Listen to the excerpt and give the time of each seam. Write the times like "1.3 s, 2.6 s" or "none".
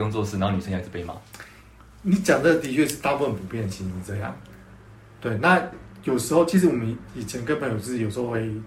none